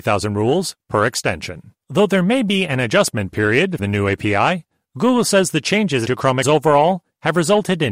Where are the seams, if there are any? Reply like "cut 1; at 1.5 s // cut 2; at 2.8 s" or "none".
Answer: cut 1; at 1.8 s // cut 2; at 3.8 s // cut 3; at 6.1 s // cut 4; at 6.4 s